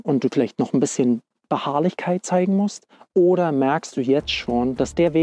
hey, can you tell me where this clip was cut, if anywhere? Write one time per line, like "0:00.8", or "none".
none